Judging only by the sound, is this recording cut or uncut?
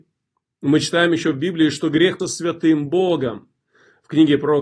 cut